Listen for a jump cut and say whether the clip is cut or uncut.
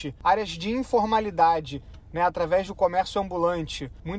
uncut